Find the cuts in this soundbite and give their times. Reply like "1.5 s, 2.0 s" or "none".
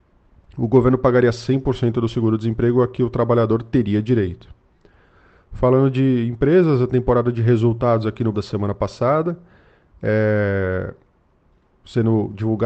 8.3 s